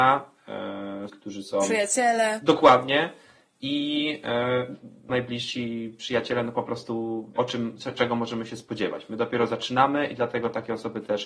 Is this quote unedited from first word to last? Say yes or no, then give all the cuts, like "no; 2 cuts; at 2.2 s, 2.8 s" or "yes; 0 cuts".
no; 3 cuts; at 1.1 s, 5.1 s, 7.4 s